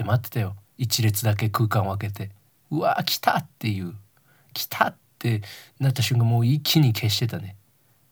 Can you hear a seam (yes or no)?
no